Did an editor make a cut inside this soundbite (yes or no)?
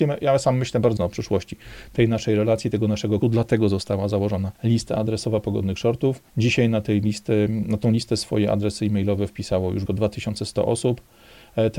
yes